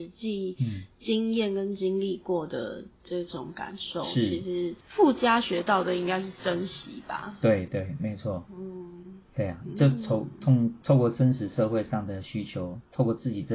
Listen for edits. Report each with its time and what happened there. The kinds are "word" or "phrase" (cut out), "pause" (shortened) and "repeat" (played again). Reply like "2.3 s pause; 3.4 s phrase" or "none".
4.8 s pause